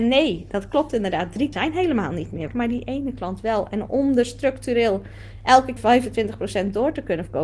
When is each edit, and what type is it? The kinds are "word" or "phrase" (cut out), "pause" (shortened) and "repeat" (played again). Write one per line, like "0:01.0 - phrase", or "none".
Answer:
0:01.5 - word
0:02.5 - word
0:05.8 - word